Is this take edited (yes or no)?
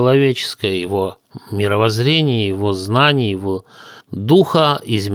yes